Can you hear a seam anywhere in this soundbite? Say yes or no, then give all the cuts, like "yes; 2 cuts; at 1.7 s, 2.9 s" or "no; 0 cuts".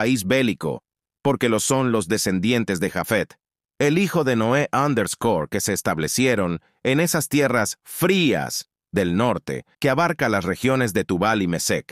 yes; 1 cut; at 9.7 s